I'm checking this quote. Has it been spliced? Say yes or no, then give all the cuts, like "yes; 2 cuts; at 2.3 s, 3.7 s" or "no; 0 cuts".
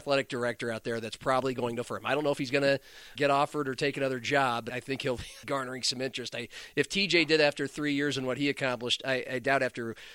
yes; 4 cuts; at 1.8 s, 3.2 s, 4.7 s, 5.4 s